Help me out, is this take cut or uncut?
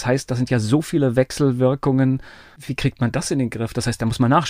uncut